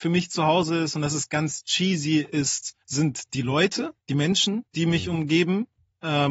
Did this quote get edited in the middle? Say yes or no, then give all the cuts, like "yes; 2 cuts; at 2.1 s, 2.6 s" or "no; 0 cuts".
yes; 3 cuts; at 2.8 s, 4.0 s, 4.7 s